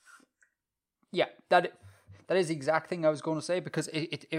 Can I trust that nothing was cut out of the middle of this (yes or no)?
yes